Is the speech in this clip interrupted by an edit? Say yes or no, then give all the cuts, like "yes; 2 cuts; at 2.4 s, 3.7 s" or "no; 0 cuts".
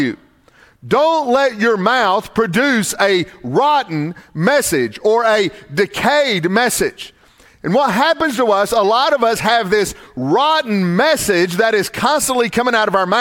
no; 0 cuts